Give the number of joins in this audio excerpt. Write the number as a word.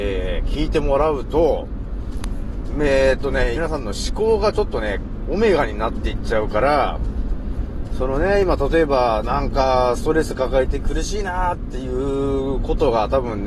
one